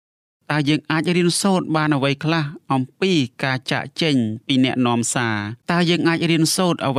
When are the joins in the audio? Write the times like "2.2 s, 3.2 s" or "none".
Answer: 5.6 s